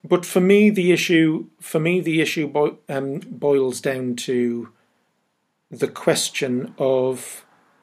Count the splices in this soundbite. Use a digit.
0